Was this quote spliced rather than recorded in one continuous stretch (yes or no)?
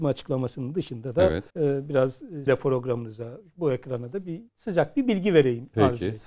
yes